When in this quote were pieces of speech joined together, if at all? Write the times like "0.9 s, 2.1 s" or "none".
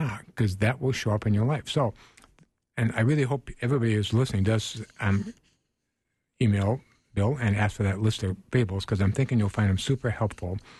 none